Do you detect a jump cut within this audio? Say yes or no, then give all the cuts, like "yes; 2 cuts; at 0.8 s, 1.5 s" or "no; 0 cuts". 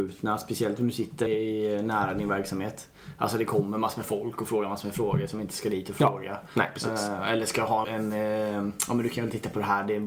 yes; 2 cuts; at 1.3 s, 7.8 s